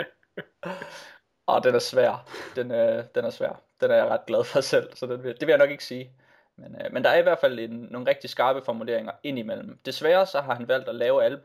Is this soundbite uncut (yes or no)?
yes